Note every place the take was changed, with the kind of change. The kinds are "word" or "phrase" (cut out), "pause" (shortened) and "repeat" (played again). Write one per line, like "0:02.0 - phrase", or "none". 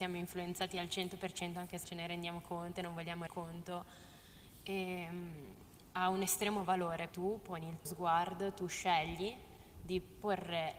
0:01.8 - word
0:03.3 - word
0:07.1 - word
0:07.9 - word